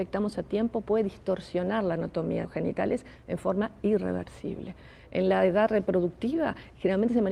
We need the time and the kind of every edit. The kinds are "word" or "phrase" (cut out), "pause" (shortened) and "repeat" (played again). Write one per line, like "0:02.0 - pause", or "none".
0:02.4 - word

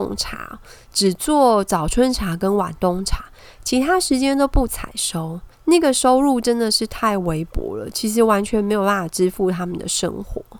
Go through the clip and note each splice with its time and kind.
0:05.5 - pause

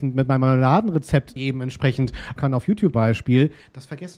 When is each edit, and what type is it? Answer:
0:01.4 - word
0:02.4 - word
0:02.9 - word

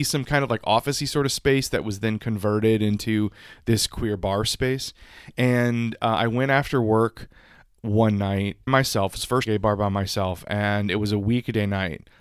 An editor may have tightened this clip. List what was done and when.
0:08.7 - word
0:09.5 - phrase

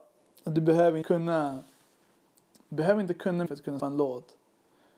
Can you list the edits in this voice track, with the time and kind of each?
0:01.0 - word
0:03.5 - word
0:03.8 - word

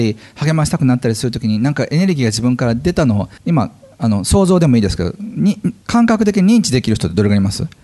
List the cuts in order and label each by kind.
0:03.4 - pause
0:05.8 - pause

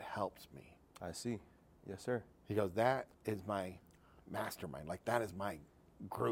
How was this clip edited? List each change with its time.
none

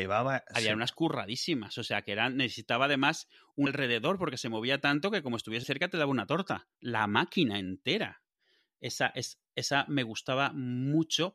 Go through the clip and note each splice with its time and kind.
0:03.7 - word
0:05.6 - word
0:06.7 - pause

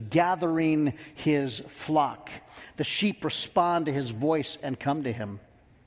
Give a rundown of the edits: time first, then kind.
none

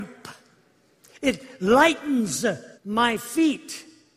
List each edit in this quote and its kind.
0:02.7 - pause

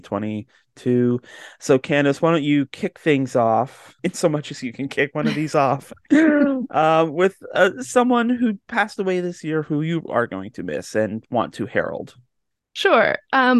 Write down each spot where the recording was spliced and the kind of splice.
0:04.0 - pause

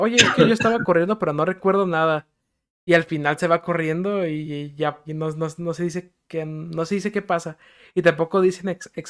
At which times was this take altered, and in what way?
0:05.0 - word

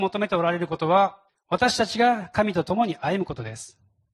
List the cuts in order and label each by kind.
0:01.3 - pause

